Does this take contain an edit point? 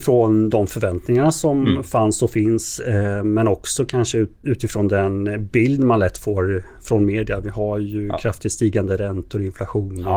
yes; 1 cut; at 4.4 s

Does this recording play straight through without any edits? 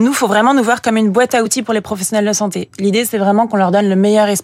yes; 0 cuts

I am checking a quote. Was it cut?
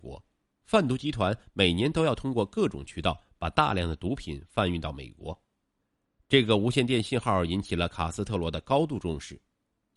no; 0 cuts

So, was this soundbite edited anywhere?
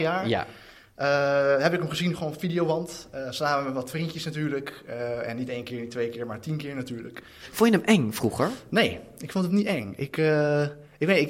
no; 0 cuts

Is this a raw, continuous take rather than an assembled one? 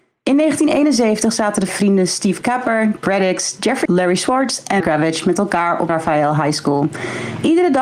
no; 5 cuts; at 1.7 s, 3.0 s, 3.9 s, 4.8 s, 5.9 s

